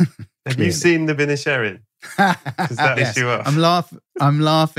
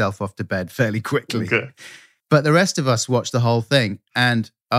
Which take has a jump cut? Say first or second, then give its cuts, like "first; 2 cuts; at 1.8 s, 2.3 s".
first; 2 cuts; at 1.2 s, 3.0 s